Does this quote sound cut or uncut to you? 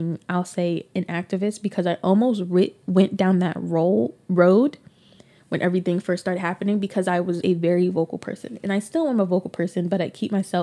cut